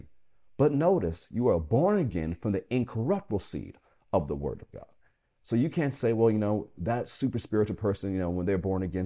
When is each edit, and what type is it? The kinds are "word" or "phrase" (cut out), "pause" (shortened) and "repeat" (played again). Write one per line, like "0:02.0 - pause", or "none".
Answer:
none

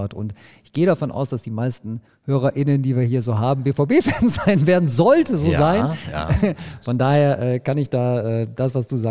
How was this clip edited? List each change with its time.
0:02.1 - pause

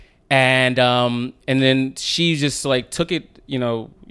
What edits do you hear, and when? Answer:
none

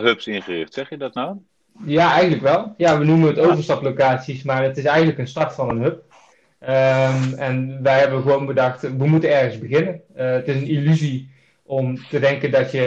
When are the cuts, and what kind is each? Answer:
none

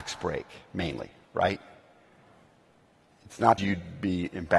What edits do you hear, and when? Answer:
0:03.6 - word

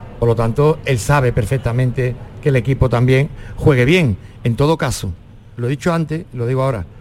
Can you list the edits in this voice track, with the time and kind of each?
none

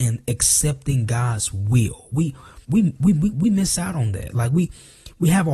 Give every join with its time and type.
0:02.6 - pause

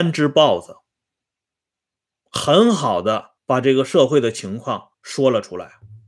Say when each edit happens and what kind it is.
0:03.4 - pause
0:04.9 - pause

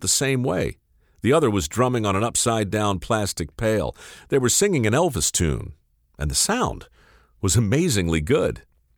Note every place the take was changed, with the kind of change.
none

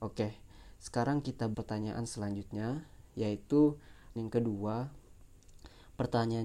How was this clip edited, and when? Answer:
0:01.5 - word
0:04.2 - word

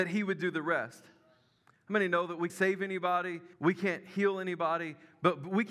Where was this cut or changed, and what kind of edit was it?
0:02.5 - word
0:03.5 - pause

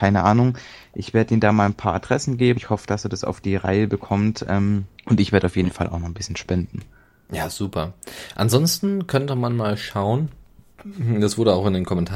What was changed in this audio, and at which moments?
0:02.6 - word
0:05.0 - pause

